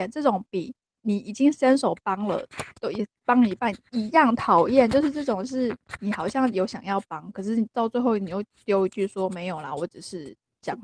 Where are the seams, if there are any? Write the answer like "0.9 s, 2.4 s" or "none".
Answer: 2.8 s, 3.2 s